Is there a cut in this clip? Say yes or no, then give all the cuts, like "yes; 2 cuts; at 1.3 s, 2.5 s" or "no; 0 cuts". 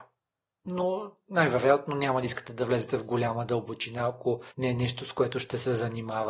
yes; 1 cut; at 4.5 s